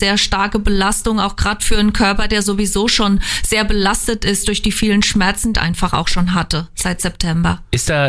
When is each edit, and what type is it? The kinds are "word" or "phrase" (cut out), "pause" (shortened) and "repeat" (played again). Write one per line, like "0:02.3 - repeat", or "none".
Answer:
0:05.5 - phrase